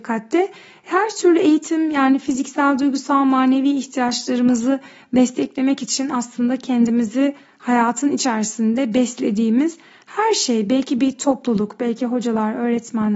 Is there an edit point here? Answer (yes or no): no